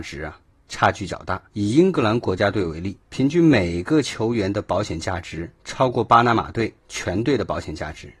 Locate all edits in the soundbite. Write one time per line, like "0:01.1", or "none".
0:01.5
0:03.0
0:05.6
0:06.8